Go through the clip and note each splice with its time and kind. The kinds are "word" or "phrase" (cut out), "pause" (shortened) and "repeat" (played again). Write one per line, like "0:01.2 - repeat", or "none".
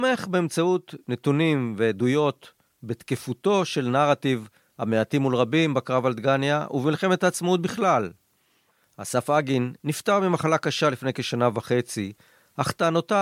0:09.8 - pause